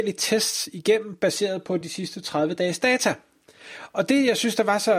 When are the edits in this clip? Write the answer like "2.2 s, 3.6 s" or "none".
none